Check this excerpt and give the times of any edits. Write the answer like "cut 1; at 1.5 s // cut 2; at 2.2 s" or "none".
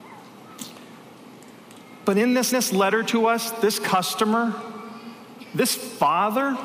cut 1; at 2.5 s